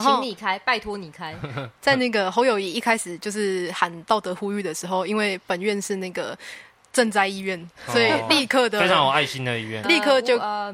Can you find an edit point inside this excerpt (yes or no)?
yes